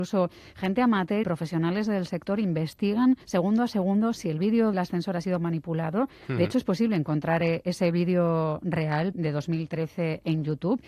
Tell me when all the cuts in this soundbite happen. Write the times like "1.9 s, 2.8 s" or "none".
1.2 s, 3.2 s, 4.7 s, 9.1 s